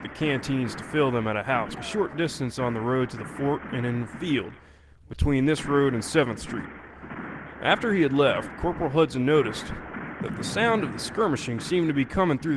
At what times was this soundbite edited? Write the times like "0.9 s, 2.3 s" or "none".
1.8 s